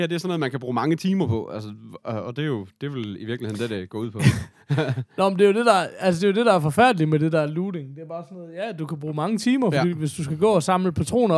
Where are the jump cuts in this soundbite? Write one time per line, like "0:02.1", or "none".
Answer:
none